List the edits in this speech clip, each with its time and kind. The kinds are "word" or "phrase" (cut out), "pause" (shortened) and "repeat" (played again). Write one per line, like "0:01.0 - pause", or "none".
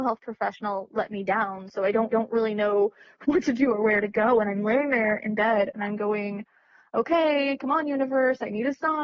0:02.1 - repeat

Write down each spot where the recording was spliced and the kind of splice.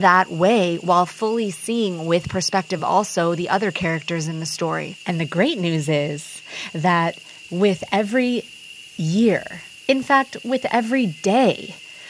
none

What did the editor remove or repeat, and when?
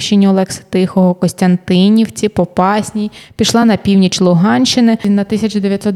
none

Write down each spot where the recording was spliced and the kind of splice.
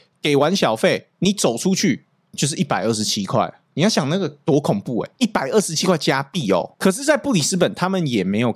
none

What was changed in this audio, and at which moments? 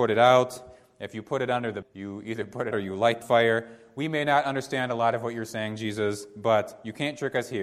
0:01.8 - word
0:02.7 - word
0:03.2 - phrase

